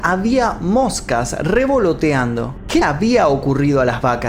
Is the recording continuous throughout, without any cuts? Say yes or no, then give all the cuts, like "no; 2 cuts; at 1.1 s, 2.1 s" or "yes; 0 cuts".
no; 1 cut; at 2.8 s